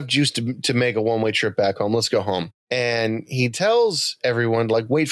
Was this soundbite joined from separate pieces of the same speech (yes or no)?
no